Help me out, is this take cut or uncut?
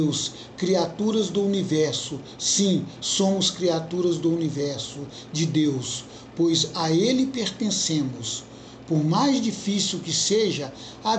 uncut